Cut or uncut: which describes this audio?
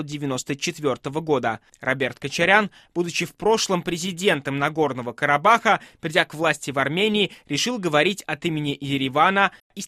uncut